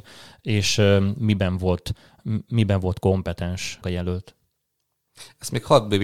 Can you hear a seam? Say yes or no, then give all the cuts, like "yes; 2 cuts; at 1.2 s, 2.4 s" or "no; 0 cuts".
yes; 1 cut; at 3.8 s